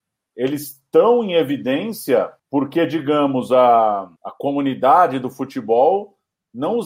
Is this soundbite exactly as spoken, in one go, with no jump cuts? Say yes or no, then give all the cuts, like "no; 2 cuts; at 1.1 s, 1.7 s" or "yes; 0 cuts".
no; 2 cuts; at 2.4 s, 4.2 s